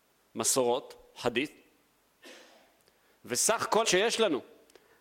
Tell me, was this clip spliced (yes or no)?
yes